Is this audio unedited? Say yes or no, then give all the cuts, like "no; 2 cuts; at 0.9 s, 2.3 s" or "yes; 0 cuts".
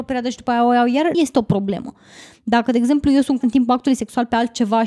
no; 2 cuts; at 1.1 s, 3.4 s